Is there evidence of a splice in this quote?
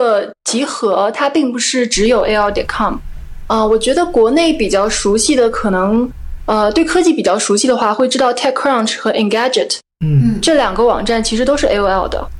no; 0 cuts

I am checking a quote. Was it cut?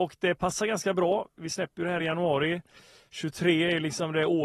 no; 0 cuts

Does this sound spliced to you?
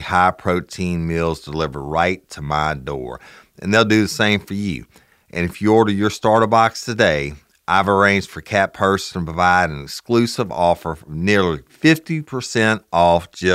no; 0 cuts

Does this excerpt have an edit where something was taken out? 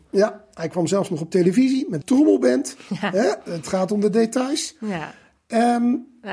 yes; 1 cut; at 2.0 s

